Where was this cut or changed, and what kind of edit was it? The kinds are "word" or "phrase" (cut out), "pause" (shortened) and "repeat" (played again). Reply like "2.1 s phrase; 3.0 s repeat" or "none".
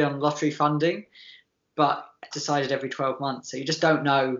2.3 s word